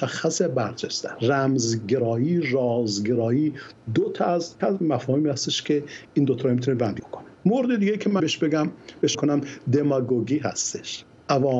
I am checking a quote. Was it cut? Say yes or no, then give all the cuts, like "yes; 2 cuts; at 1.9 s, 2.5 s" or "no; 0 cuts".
yes; 5 cuts; at 1.1 s, 4.6 s, 7.0 s, 8.2 s, 9.1 s